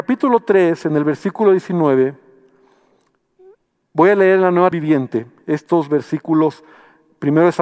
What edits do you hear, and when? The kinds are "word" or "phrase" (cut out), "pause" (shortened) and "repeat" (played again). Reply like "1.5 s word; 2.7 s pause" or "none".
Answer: 4.7 s word